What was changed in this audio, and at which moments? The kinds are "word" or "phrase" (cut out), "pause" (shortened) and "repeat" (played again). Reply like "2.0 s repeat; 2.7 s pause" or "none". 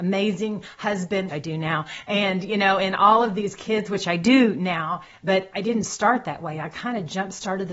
1.3 s word